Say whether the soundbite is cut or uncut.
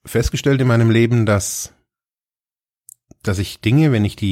uncut